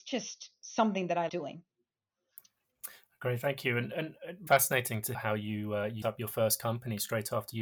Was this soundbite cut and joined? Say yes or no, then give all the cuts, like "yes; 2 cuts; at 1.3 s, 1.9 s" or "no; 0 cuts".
yes; 4 cuts; at 1.3 s, 4.5 s, 5.1 s, 6.0 s